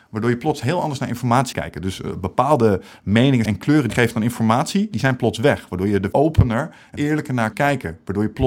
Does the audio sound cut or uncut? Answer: cut